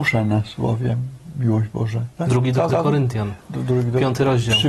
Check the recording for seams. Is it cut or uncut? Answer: cut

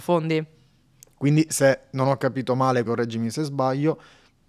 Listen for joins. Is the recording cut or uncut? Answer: cut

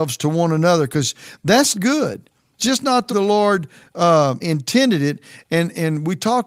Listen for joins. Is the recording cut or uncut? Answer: cut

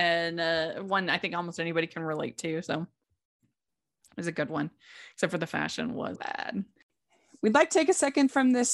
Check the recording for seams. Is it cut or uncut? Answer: cut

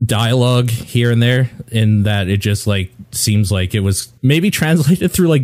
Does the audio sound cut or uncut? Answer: cut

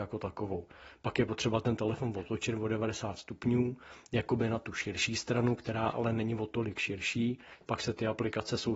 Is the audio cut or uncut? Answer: uncut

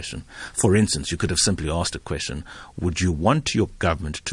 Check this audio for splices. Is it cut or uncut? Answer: uncut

